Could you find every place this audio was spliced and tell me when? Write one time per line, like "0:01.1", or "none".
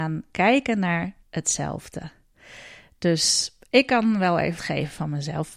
0:01.2
0:04.6